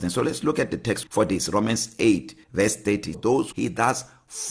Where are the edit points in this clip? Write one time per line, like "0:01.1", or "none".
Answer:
0:01.0
0:03.1
0:03.5